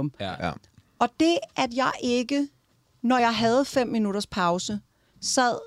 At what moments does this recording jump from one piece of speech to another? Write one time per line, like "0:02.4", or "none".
none